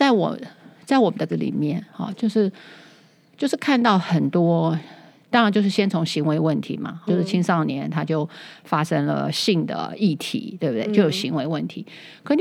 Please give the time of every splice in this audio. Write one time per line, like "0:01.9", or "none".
0:01.3
0:07.1

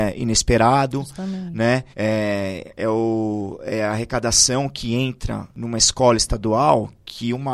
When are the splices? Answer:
0:01.9

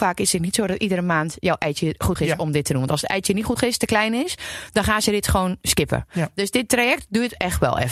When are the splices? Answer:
0:02.2
0:03.6

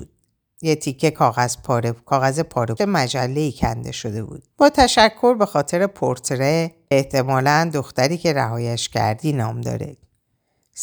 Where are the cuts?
0:02.8
0:04.5
0:06.9

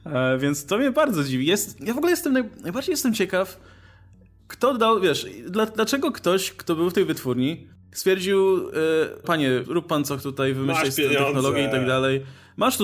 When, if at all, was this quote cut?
0:09.2
0:09.6
0:10.2

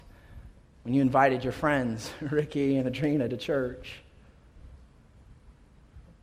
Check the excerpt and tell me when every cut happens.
none

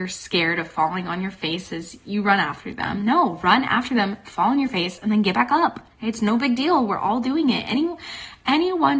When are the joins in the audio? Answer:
0:05.9

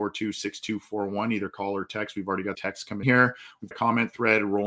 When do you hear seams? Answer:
0:02.5
0:03.0
0:03.7

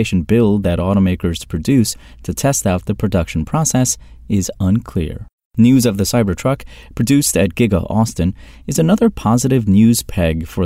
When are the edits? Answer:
none

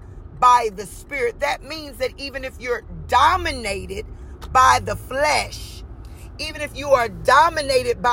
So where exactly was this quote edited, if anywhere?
none

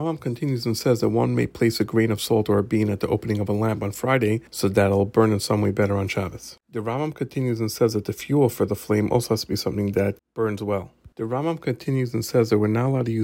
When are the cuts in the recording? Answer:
0:04.5
0:06.6
0:11.1

